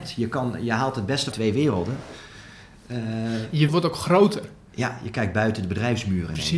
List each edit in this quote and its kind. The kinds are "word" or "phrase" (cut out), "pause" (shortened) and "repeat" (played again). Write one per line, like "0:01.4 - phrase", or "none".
0:01.3 - word
0:03.7 - word